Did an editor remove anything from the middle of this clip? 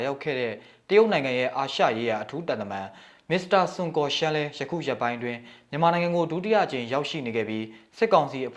no; 0 cuts

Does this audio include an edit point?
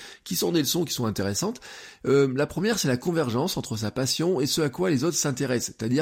no; 0 cuts

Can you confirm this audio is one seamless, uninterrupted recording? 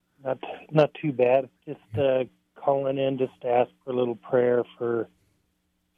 no; 1 cut; at 1.6 s

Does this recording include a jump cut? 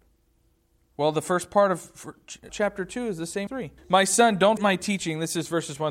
yes; 4 cuts; at 2.5 s, 3.5 s, 3.8 s, 4.6 s

